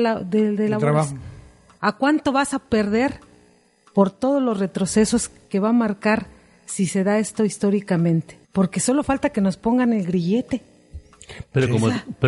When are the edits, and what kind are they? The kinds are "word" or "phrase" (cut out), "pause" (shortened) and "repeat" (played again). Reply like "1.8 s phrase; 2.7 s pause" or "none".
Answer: 8.4 s pause